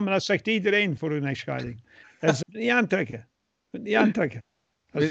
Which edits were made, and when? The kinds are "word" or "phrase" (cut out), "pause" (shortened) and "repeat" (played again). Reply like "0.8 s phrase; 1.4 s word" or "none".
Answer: 1.0 s word; 2.4 s word